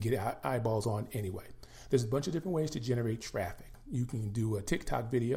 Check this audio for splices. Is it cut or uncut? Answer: uncut